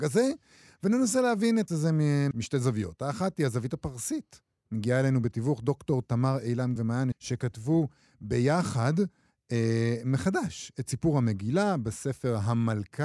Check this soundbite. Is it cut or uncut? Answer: cut